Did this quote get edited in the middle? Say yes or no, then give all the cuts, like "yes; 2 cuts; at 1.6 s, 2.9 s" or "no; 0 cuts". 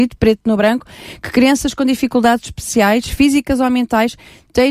no; 0 cuts